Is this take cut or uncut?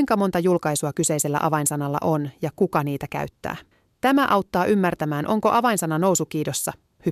cut